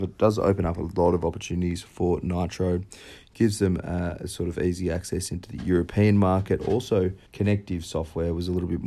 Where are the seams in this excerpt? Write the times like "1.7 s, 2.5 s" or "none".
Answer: 7.2 s

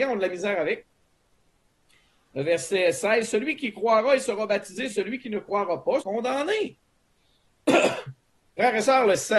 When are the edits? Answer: 4.9 s, 6.0 s

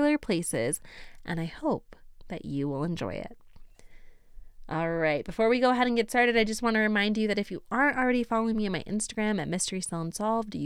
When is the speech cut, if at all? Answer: none

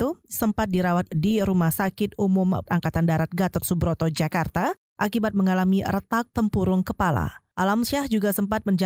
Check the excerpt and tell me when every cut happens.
1.1 s, 2.7 s

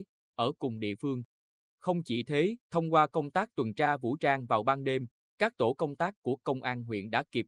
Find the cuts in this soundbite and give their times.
2.6 s

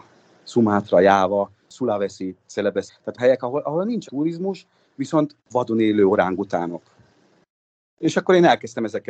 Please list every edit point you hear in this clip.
2.9 s, 3.2 s, 4.1 s, 5.4 s

